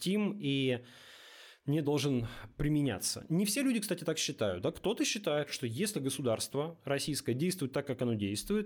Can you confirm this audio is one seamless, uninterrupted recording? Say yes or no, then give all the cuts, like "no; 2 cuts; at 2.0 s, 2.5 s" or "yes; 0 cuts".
yes; 0 cuts